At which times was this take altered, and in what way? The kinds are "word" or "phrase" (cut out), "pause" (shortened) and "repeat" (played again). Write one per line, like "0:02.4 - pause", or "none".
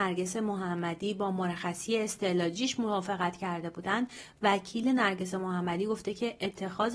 none